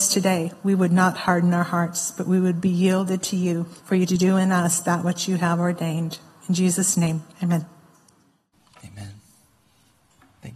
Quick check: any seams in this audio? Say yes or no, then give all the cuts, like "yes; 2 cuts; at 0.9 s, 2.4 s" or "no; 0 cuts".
yes; 2 cuts; at 3.8 s, 7.3 s